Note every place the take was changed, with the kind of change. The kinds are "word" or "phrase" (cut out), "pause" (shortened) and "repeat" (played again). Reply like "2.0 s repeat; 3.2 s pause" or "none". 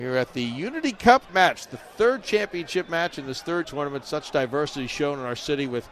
1.3 s word; 3.6 s phrase